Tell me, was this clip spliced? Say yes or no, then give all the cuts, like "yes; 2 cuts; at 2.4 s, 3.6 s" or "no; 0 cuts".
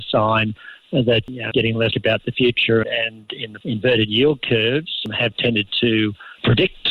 yes; 4 cuts; at 1.5 s, 1.9 s, 2.8 s, 3.6 s